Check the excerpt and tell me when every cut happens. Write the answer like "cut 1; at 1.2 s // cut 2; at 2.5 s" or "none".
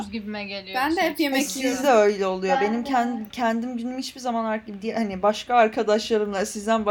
none